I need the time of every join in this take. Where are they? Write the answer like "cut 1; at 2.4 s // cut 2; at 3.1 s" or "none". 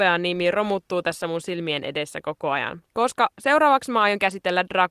cut 1; at 2.9 s

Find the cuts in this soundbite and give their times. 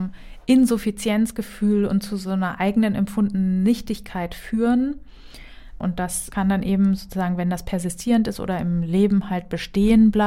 none

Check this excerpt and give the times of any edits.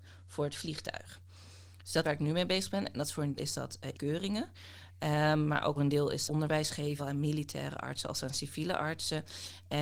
cut 1; at 2.0 s // cut 2; at 3.4 s // cut 3; at 3.9 s // cut 4; at 5.8 s // cut 5; at 6.3 s // cut 6; at 7.0 s

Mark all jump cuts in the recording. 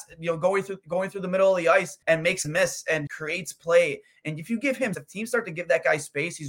cut 1; at 2.0 s // cut 2; at 2.4 s // cut 3; at 3.1 s // cut 4; at 4.9 s

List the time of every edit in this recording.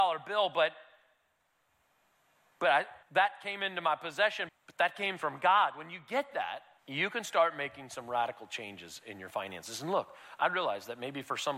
cut 1; at 3.0 s // cut 2; at 4.5 s // cut 3; at 6.8 s

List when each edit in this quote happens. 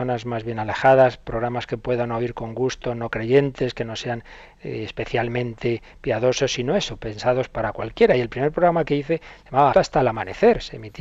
cut 1; at 9.7 s

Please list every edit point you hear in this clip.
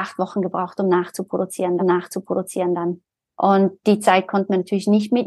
cut 1; at 1.8 s

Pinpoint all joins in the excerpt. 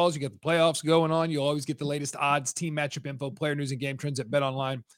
none

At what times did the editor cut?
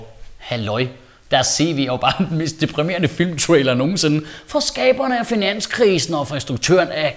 none

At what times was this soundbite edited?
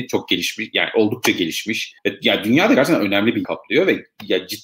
cut 1; at 2.0 s // cut 2; at 3.4 s

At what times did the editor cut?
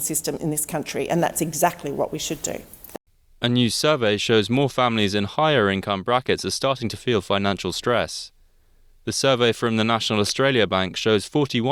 none

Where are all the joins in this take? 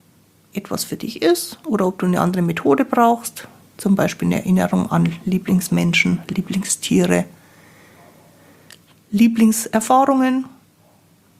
none

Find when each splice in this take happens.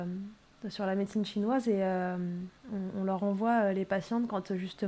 none

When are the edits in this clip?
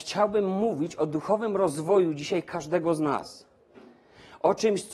none

